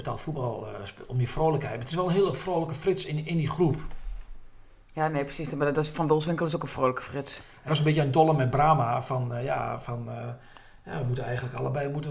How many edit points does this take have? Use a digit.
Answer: 1